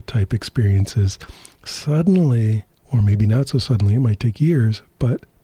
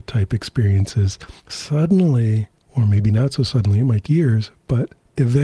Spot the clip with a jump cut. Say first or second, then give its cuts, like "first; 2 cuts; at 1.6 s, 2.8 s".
second; 2 cuts; at 1.4 s, 4.0 s